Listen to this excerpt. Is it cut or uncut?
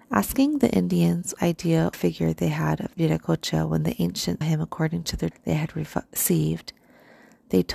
cut